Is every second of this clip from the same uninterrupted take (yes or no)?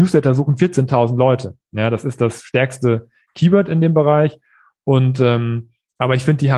yes